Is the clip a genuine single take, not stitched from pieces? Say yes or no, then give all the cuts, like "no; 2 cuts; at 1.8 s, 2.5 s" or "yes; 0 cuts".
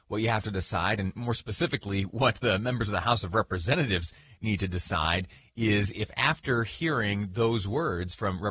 yes; 0 cuts